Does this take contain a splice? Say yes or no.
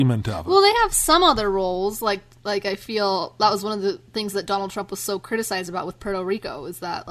no